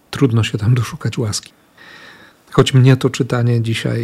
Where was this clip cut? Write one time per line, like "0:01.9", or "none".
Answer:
none